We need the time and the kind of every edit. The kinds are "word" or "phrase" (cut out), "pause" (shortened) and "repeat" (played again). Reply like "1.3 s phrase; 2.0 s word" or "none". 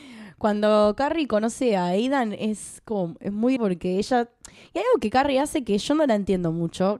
3.6 s word